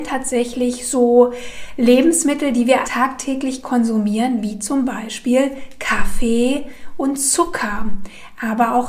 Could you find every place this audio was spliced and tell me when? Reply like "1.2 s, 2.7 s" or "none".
2.8 s